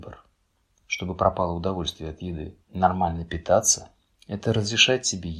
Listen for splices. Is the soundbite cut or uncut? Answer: cut